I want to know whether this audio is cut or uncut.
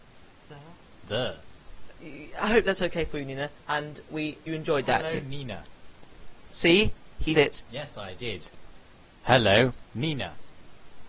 cut